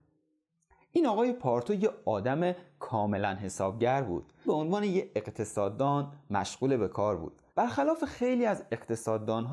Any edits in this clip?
yes; 2 cuts; at 4.5 s, 7.5 s

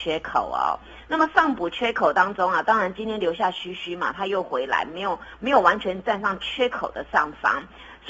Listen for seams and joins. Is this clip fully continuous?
yes; 0 cuts

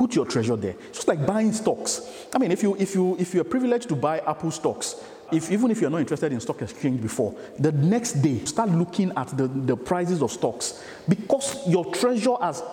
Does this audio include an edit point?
yes; 2 cuts; at 5.3 s, 8.5 s

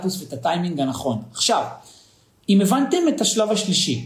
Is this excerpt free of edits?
yes; 0 cuts

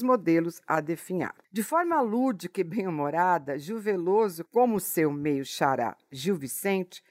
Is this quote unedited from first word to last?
no; 1 cut; at 1.4 s

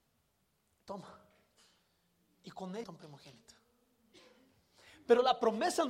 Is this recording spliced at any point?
yes; 1 cut; at 2.8 s

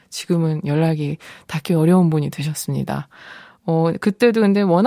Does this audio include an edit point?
no; 0 cuts

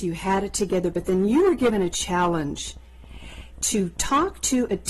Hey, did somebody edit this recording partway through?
no; 0 cuts

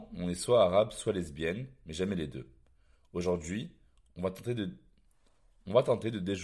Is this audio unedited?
yes; 0 cuts

